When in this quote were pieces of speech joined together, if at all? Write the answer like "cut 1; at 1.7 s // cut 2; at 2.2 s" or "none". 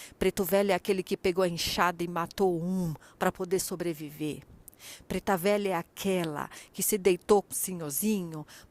cut 1; at 7.5 s